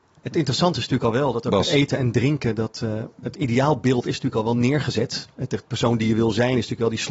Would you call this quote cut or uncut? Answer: uncut